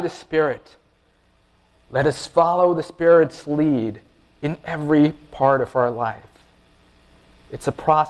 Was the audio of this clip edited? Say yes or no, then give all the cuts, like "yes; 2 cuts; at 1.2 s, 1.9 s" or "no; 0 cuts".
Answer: no; 0 cuts